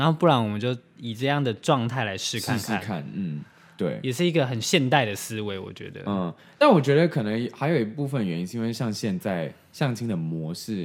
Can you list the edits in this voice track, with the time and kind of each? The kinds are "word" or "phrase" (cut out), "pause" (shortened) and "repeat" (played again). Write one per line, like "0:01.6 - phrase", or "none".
none

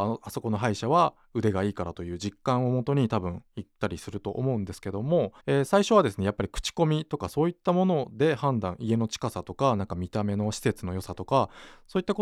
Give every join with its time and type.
0:05.4 - pause

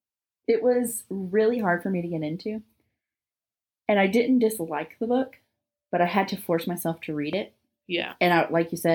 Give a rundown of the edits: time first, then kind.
none

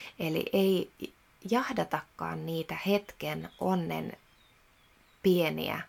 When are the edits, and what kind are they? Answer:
none

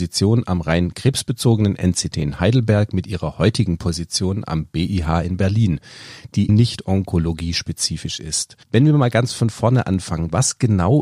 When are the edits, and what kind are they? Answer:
0:06.5 - word
0:08.6 - pause

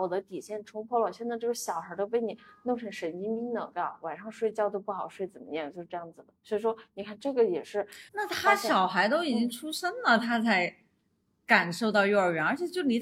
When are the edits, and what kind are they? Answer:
0:06.4 - pause
0:08.1 - pause

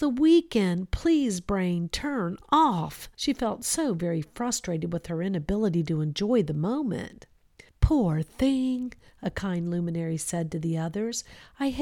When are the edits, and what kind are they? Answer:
0:03.1 - pause
0:07.7 - pause

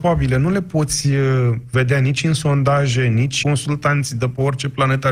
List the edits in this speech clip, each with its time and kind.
0:03.4 - word

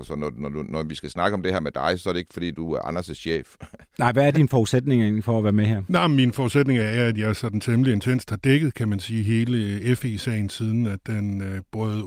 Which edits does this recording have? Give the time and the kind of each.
none

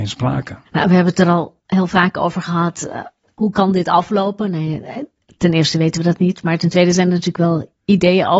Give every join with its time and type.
none

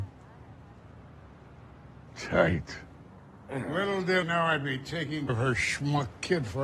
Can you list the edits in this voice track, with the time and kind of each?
0:04.2 - word
0:05.3 - word

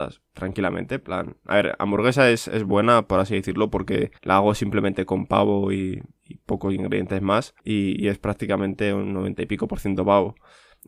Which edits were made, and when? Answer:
0:04.2 - pause
0:07.6 - pause

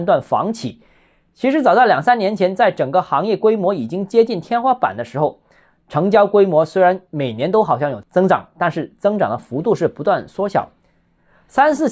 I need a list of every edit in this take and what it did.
none

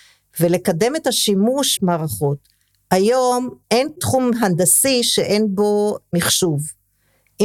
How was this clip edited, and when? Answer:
0:01.8 - phrase
0:03.6 - pause

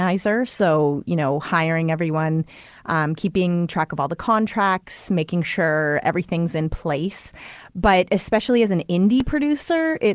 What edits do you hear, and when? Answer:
none

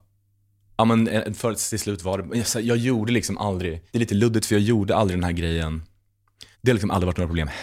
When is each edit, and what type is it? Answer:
0:03.9 - pause
0:06.5 - pause

